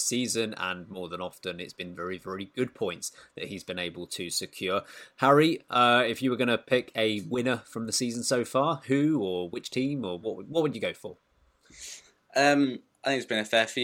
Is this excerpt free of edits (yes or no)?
yes